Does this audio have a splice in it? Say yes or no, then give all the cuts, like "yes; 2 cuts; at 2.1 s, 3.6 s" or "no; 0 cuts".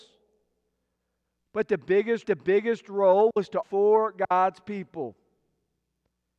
yes; 2 cuts; at 2.2 s, 3.6 s